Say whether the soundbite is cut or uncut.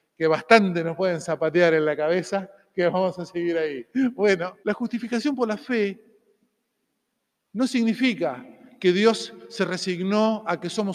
cut